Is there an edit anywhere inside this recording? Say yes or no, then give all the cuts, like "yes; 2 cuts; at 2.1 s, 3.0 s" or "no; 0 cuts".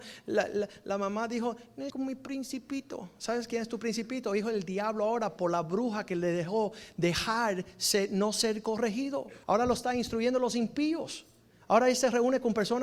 yes; 2 cuts; at 1.9 s, 9.4 s